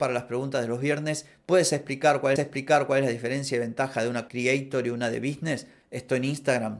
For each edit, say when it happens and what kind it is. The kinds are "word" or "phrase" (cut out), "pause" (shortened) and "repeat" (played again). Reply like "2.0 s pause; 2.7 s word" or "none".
2.4 s repeat; 4.3 s word